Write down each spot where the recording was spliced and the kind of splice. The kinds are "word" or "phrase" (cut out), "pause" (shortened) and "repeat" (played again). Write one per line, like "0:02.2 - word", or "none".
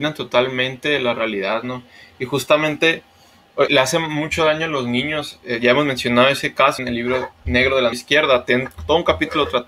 0:03.7 - word
0:06.8 - word
0:07.9 - word